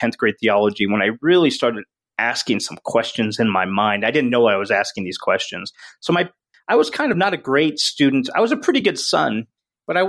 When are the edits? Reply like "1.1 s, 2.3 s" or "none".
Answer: none